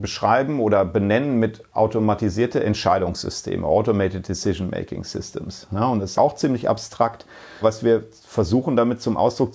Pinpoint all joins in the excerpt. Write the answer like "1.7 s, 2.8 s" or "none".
6.2 s, 7.6 s